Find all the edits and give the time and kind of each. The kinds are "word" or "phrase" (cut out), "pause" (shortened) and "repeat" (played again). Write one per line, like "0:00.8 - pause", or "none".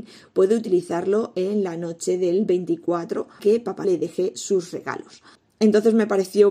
0:03.4 - word
0:03.8 - word
0:05.3 - pause